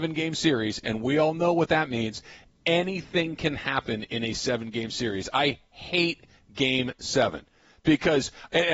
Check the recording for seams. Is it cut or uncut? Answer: uncut